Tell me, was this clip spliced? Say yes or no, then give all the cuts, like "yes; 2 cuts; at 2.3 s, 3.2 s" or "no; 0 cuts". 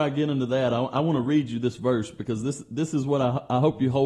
no; 0 cuts